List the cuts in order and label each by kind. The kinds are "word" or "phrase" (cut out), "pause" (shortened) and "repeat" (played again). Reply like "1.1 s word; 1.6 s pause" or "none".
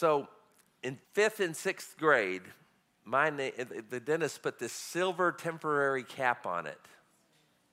1.0 s pause